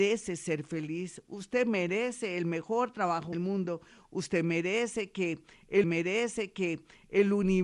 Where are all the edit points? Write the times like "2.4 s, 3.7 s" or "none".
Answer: 3.3 s, 5.8 s